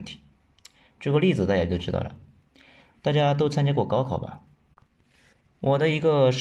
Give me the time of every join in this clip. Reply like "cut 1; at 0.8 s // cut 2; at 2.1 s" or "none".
none